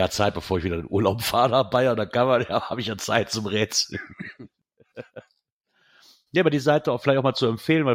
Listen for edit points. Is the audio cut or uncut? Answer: uncut